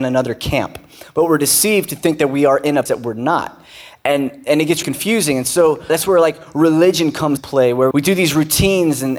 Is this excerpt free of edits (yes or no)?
no